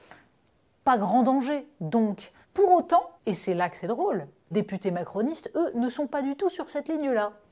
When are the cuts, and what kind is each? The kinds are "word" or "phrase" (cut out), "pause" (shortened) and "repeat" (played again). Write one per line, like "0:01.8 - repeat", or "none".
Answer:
0:02.4 - pause
0:03.2 - pause
0:04.5 - word